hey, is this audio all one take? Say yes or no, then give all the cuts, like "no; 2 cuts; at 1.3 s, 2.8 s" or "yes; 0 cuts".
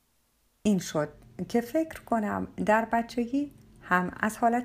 yes; 0 cuts